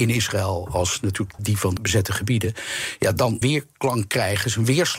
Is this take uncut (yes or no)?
no